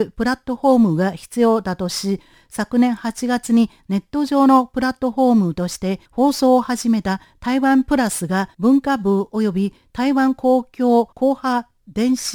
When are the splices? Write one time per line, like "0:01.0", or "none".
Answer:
0:06.1
0:08.5
0:11.1